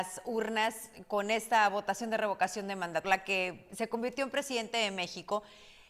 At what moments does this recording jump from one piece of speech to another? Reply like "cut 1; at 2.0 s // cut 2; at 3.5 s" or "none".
cut 1; at 3.0 s

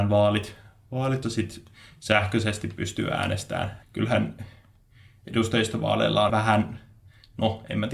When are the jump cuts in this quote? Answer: cut 1; at 1.2 s // cut 2; at 3.8 s // cut 3; at 6.3 s

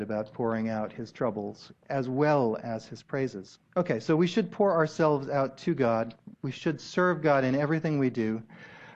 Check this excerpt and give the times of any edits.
cut 1; at 3.7 s // cut 2; at 6.3 s

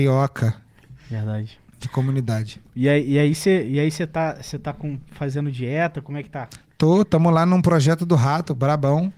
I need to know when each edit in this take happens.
cut 1; at 1.7 s

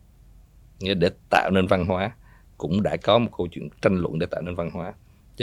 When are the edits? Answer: none

